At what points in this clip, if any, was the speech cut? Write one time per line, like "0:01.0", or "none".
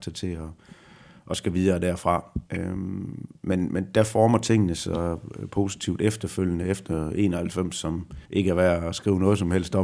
0:02.5
0:08.3